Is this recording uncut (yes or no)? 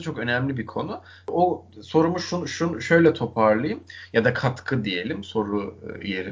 yes